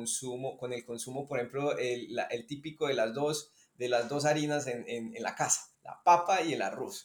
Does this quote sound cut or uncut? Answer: cut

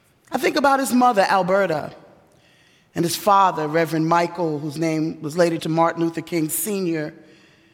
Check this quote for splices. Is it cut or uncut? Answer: cut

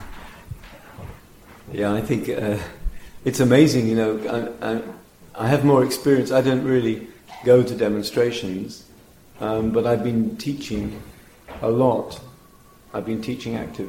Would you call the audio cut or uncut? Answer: uncut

